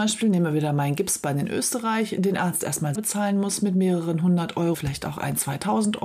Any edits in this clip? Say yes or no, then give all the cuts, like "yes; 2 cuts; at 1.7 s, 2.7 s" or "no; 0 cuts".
yes; 2 cuts; at 3.0 s, 4.7 s